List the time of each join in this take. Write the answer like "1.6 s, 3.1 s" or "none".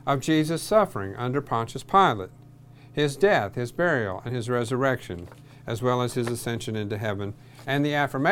4.3 s